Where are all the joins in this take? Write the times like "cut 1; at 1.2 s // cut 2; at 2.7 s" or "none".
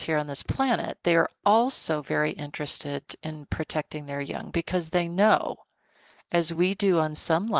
none